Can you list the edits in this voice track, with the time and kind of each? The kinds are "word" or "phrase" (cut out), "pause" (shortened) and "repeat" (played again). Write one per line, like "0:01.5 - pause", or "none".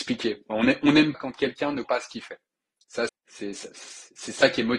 0:01.1 - word
0:01.8 - word
0:03.1 - word